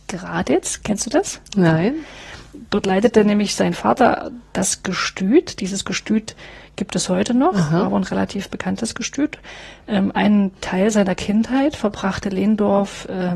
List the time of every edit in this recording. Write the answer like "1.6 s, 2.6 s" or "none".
10.6 s